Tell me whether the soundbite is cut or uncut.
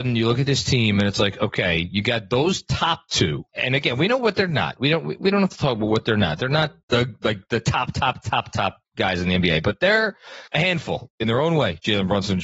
cut